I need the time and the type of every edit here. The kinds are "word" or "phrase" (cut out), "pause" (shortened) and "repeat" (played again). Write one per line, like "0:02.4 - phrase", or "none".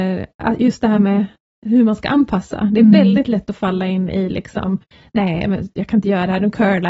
none